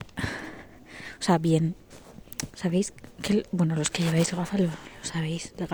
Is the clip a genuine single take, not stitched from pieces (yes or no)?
yes